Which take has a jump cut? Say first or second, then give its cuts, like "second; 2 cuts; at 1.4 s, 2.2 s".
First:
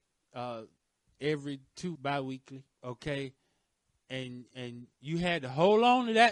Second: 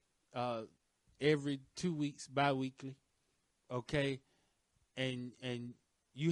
first; 3 cuts; at 1.9 s, 2.7 s, 4.9 s